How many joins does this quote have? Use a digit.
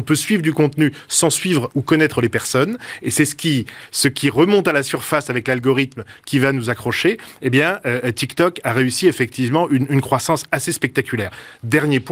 0